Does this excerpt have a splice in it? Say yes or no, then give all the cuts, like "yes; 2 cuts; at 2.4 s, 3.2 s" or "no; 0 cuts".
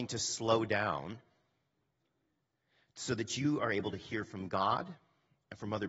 no; 0 cuts